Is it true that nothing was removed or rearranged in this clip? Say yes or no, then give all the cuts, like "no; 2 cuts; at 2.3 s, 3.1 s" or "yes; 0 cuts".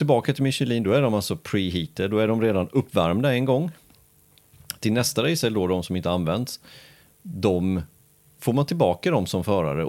yes; 0 cuts